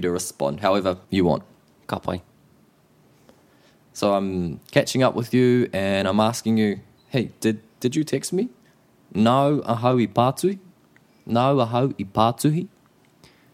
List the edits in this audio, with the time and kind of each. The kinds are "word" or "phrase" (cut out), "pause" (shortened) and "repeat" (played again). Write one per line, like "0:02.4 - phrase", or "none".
none